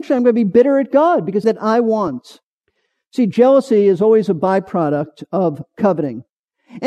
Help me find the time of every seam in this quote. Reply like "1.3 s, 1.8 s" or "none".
1.4 s, 2.6 s